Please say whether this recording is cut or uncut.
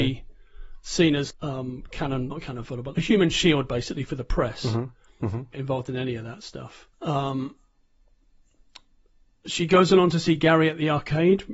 cut